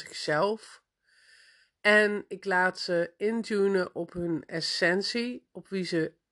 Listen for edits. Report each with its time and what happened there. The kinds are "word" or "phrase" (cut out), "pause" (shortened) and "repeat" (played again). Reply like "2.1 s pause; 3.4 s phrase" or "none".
none